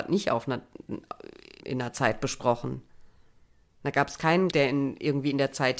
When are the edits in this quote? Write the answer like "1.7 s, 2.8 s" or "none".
1.6 s, 4.5 s